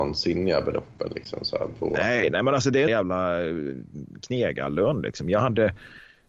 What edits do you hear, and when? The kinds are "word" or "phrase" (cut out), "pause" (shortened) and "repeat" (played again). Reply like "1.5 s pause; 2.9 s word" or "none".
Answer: 2.9 s word